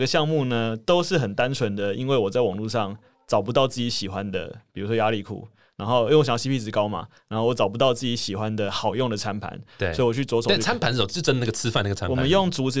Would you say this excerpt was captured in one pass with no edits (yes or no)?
yes